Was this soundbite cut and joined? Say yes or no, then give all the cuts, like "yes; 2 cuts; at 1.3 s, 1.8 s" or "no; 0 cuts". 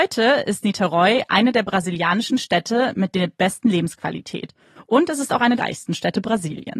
yes; 1 cut; at 5.6 s